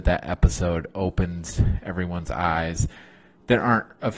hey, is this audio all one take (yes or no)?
yes